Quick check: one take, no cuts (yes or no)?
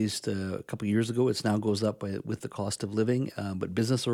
yes